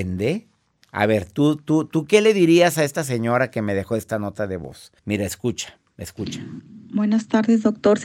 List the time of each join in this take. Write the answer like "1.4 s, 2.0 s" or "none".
5.0 s